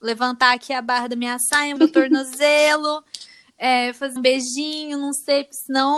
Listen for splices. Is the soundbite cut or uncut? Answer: cut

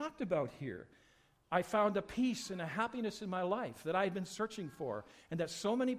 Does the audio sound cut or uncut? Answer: uncut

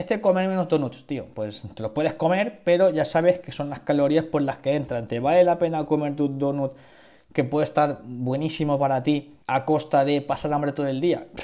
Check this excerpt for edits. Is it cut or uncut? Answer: cut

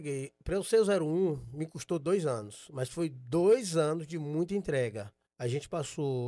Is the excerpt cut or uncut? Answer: cut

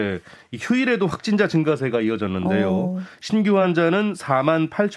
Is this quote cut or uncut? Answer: uncut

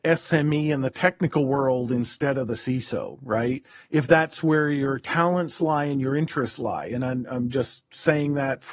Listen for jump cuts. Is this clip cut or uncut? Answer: uncut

